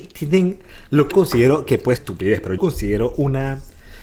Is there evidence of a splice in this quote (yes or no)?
yes